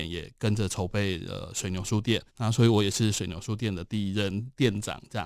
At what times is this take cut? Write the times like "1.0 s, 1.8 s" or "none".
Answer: 2.3 s